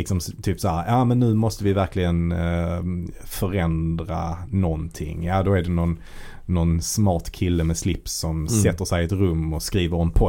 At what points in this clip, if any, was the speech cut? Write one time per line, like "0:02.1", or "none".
none